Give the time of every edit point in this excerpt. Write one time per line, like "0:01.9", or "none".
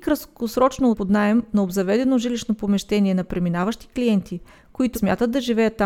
0:00.9
0:04.9